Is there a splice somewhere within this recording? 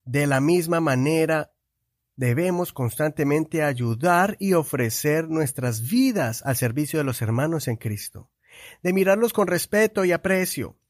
no; 0 cuts

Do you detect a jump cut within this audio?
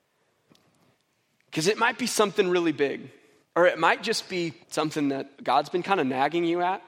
yes; 3 cuts; at 3.4 s, 4.6 s, 5.3 s

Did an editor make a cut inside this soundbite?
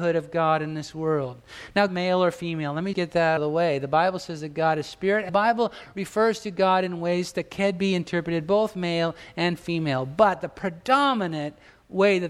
yes; 4 cuts; at 1.9 s, 2.9 s, 3.4 s, 5.3 s

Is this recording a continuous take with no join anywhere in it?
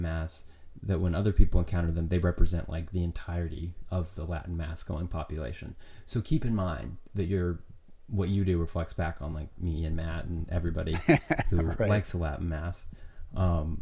yes; 0 cuts

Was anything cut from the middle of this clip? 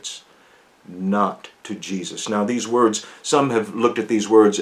yes; 1 cut; at 1.6 s

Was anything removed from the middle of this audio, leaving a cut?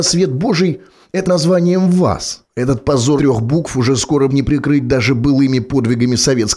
yes; 4 cuts; at 1.2 s, 2.5 s, 3.2 s, 4.3 s

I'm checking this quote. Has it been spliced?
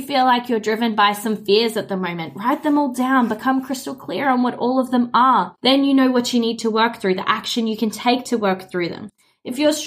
yes; 1 cut; at 5.6 s

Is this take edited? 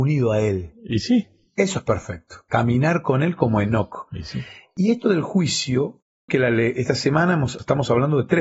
yes; 1 cut; at 6.3 s

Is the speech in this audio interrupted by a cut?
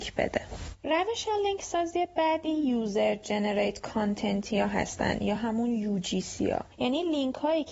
no; 0 cuts

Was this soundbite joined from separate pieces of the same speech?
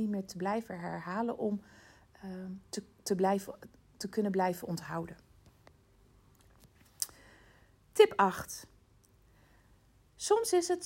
no; 0 cuts

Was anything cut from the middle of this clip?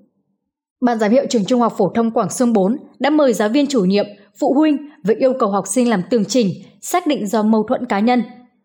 no; 0 cuts

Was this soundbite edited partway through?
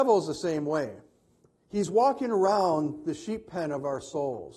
no; 0 cuts

